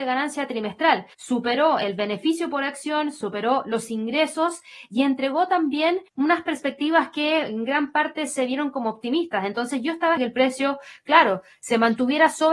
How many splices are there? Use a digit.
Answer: 3